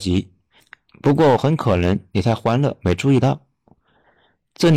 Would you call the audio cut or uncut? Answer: uncut